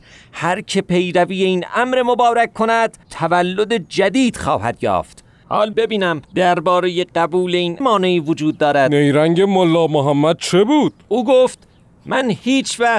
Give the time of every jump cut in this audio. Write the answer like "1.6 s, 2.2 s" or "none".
3.0 s, 5.7 s, 6.2 s, 7.8 s

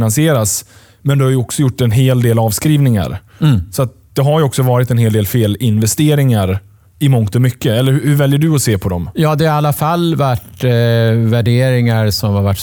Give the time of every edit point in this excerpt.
none

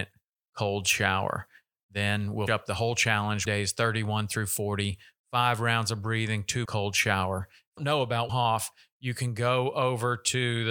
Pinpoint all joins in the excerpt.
2.5 s, 3.5 s, 6.7 s, 7.8 s, 8.3 s

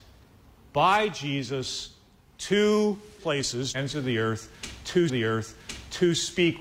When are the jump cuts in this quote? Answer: 3.2 s, 3.7 s, 5.1 s

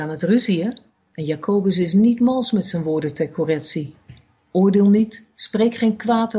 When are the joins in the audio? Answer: none

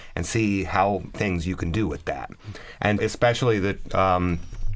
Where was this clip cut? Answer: 1.1 s, 3.0 s

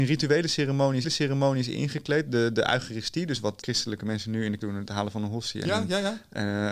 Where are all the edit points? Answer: 1.0 s, 3.6 s, 4.6 s

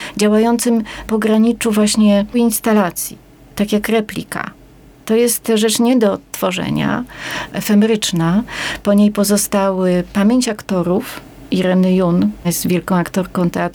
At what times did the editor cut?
1.1 s, 2.3 s, 12.4 s

